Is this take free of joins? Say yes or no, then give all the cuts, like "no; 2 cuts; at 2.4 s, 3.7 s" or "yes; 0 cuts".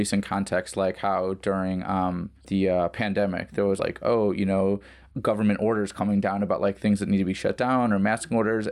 no; 3 cuts; at 2.4 s, 3.8 s, 5.1 s